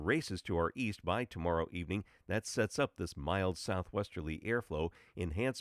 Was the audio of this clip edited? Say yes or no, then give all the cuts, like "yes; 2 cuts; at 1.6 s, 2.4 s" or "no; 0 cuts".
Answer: no; 0 cuts